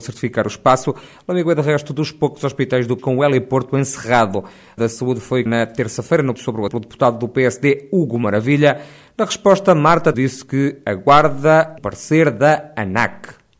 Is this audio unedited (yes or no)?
no